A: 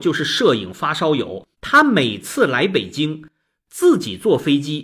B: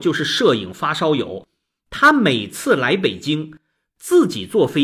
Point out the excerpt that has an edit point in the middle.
A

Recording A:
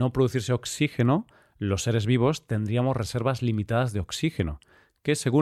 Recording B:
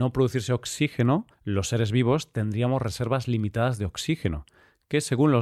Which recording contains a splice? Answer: B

